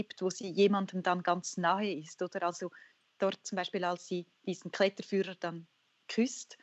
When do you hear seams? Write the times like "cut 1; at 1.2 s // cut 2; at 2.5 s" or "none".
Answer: none